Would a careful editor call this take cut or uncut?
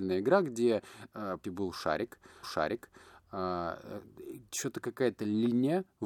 cut